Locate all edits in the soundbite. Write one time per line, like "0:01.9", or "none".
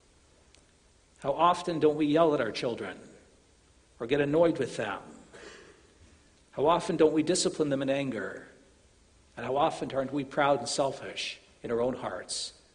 none